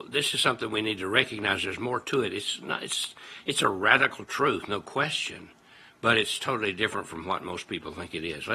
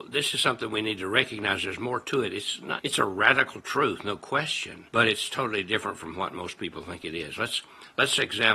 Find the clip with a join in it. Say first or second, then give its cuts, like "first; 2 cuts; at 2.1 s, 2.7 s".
second; 2 cuts; at 2.8 s, 4.9 s